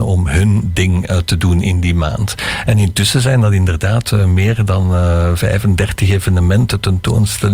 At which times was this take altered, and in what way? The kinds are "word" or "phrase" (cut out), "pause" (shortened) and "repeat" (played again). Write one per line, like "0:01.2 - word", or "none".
none

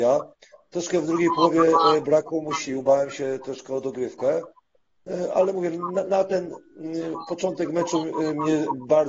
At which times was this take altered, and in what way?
none

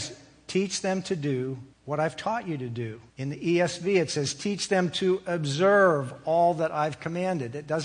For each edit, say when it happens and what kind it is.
0:01.7 - pause
0:03.1 - pause

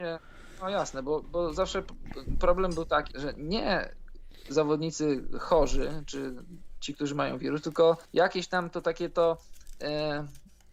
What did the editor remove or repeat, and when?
0:03.1 - word
0:08.1 - pause

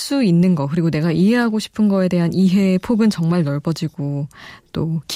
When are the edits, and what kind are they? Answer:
none

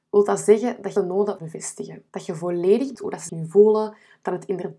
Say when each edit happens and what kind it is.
0:01.0 - phrase
0:01.4 - phrase
0:02.1 - pause
0:02.9 - word
0:03.3 - word

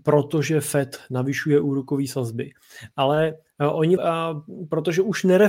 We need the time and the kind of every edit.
0:04.0 - phrase

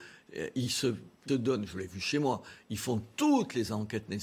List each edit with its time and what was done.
0:01.3 - word

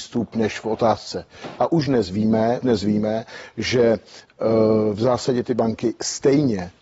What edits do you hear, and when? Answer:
0:01.6 - word
0:02.6 - word

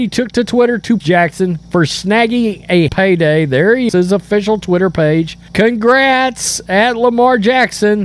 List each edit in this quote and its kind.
0:01.0 - word
0:01.6 - pause
0:02.9 - word
0:03.9 - word
0:05.5 - pause

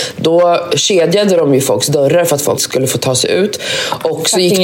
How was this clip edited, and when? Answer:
0:02.6 - word

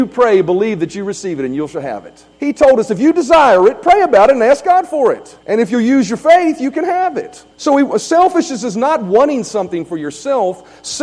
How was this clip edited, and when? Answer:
0:02.3 - pause
0:05.4 - pause
0:07.5 - pause
0:08.0 - word

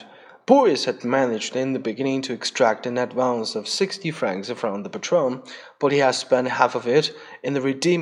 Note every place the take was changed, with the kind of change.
none

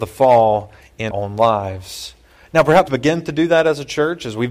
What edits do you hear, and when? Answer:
0:01.1 - word
0:02.9 - word

